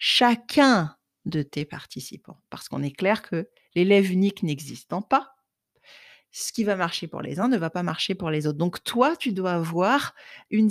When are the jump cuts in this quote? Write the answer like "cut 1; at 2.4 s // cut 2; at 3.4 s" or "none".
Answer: none